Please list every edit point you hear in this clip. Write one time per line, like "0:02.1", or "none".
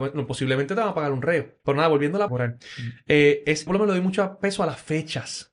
0:01.6
0:02.3
0:03.7